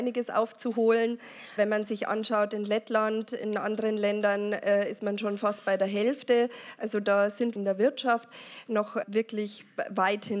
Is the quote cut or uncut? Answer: cut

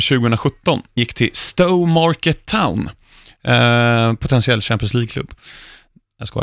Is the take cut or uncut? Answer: cut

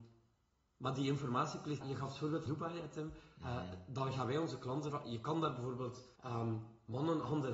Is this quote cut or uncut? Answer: cut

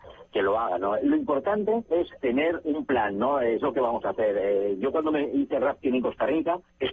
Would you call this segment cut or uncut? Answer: cut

